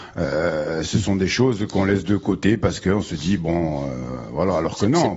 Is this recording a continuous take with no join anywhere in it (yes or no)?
yes